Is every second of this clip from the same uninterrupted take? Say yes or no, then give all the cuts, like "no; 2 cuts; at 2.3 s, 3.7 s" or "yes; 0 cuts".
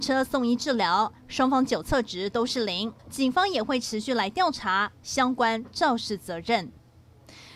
no; 1 cut; at 3.0 s